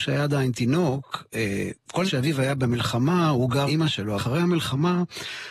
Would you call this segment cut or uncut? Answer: cut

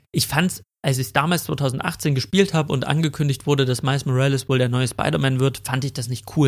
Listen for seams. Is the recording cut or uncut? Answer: uncut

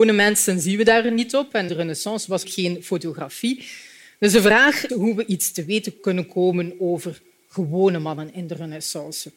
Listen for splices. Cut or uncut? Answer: cut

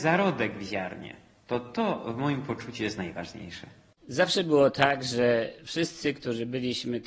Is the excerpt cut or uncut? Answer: uncut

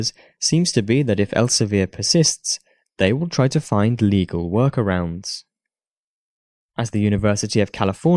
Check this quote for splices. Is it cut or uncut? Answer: uncut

